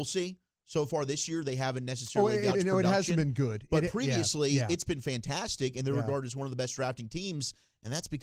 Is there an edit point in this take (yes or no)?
yes